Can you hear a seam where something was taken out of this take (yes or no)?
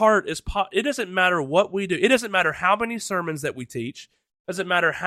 no